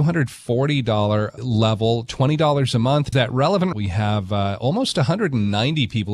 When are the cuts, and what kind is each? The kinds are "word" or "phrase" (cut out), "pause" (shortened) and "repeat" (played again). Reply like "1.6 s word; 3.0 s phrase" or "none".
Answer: 1.4 s word; 3.1 s phrase; 3.7 s phrase